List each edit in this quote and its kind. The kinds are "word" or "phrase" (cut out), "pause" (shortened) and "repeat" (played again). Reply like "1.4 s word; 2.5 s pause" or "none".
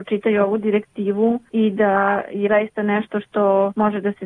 2.5 s word